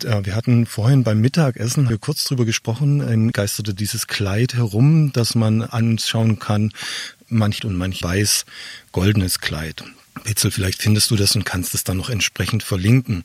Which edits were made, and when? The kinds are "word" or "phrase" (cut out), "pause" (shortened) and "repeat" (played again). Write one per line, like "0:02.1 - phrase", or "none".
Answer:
0:01.9 - word
0:03.3 - word
0:07.6 - phrase
0:08.0 - phrase